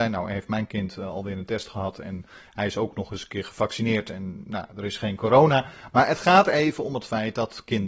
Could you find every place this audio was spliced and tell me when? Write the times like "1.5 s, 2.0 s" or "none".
none